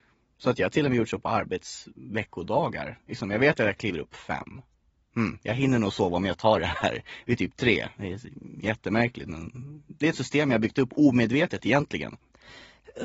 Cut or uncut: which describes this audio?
cut